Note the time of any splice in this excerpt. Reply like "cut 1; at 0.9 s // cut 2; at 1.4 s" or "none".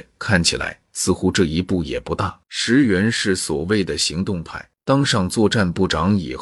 cut 1; at 2.4 s // cut 2; at 4.8 s